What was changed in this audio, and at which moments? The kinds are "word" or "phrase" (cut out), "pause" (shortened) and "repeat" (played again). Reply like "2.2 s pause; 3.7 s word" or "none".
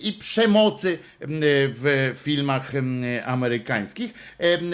none